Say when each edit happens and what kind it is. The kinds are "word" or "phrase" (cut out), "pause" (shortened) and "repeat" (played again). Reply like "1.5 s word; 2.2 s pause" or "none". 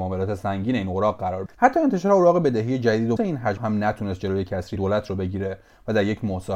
1.5 s word; 3.2 s word; 3.6 s word; 4.8 s word